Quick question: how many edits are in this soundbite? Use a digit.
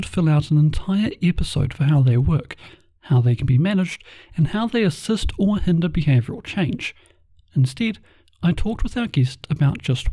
0